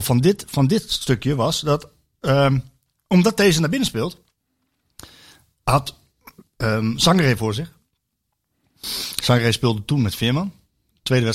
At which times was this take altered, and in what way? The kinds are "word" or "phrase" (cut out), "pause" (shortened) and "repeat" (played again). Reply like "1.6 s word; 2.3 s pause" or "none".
none